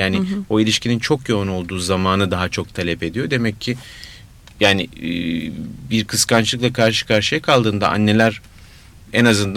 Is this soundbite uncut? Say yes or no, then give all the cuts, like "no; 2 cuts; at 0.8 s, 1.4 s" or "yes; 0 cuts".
yes; 0 cuts